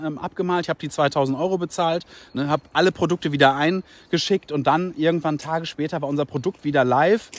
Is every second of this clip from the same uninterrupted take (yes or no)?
yes